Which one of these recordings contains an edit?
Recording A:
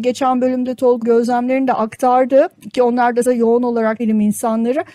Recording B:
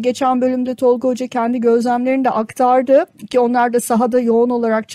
A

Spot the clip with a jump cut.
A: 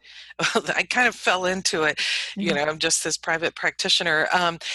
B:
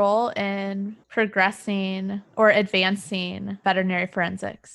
B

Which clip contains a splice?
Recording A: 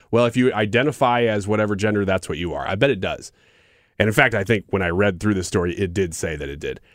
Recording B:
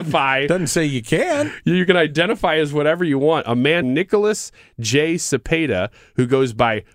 B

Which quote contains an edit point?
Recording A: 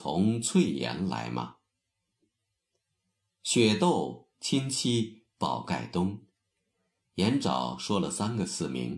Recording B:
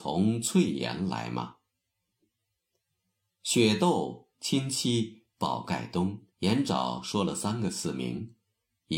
B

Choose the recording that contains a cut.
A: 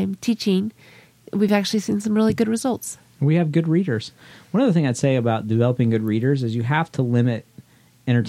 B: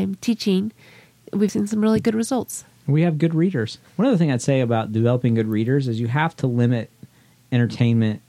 B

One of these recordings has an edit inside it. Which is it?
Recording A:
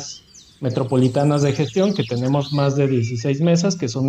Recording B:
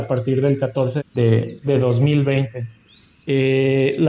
B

